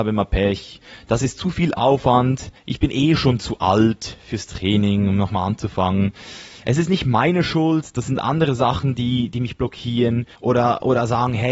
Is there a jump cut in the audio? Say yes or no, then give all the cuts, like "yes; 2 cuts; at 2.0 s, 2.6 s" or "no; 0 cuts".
yes; 2 cuts; at 2.6 s, 10.3 s